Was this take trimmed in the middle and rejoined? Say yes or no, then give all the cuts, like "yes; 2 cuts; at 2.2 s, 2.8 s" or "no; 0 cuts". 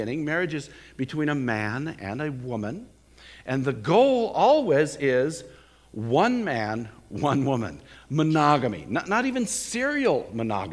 no; 0 cuts